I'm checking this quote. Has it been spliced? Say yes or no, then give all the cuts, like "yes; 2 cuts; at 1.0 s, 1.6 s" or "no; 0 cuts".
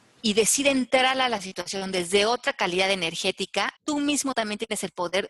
yes; 1 cut; at 3.8 s